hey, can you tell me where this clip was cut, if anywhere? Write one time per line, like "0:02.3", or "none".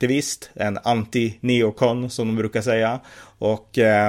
none